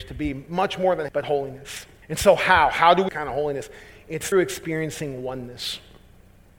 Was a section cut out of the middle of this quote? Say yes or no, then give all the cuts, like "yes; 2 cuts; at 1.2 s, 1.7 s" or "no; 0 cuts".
yes; 4 cuts; at 1.1 s, 2.0 s, 3.1 s, 4.3 s